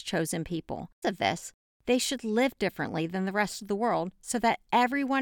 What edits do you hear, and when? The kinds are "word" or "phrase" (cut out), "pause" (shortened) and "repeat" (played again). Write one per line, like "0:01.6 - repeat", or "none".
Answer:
0:01.0 - phrase